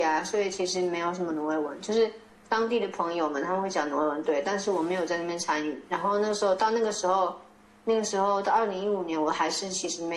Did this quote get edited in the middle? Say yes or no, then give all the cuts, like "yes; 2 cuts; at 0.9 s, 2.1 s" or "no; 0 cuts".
no; 0 cuts